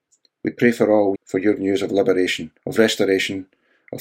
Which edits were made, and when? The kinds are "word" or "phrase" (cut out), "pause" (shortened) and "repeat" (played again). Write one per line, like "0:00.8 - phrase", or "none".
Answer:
0:01.2 - word
0:01.6 - word
0:02.6 - pause